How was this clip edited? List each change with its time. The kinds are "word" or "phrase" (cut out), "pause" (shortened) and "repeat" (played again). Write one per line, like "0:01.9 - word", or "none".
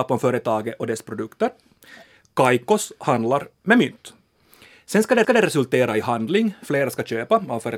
0:05.2 - repeat